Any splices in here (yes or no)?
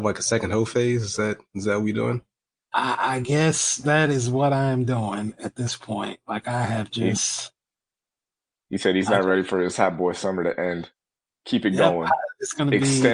no